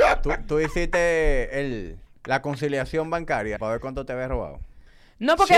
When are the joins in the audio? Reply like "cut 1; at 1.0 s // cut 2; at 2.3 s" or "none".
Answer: cut 1; at 2.1 s // cut 2; at 3.6 s